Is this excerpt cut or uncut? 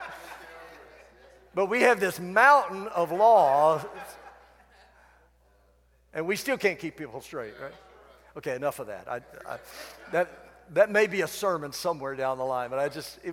uncut